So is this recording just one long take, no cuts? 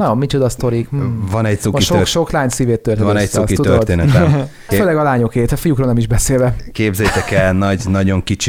no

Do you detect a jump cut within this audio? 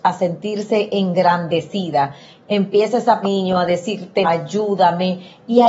yes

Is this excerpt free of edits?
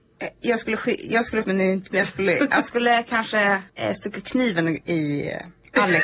no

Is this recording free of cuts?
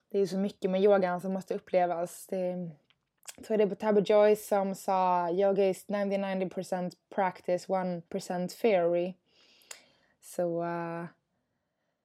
no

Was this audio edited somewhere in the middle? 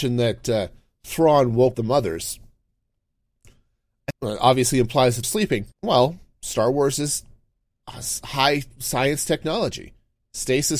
yes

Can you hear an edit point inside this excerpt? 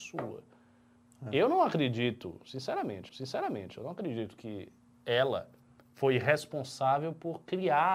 yes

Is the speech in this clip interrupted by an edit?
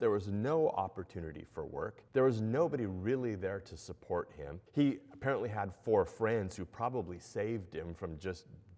yes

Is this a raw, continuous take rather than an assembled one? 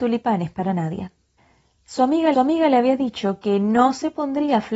no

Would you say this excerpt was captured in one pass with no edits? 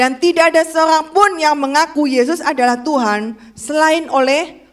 yes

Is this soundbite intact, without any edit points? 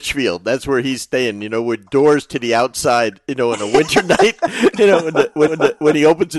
no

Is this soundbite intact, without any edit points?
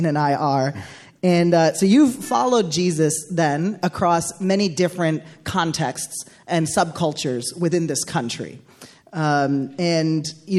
yes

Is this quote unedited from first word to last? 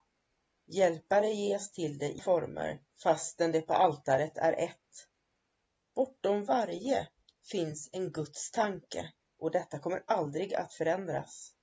no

